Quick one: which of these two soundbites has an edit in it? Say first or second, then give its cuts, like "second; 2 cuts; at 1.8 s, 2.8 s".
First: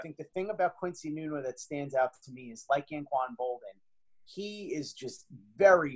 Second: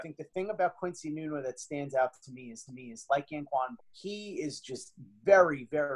second; 2 cuts; at 2.7 s, 3.8 s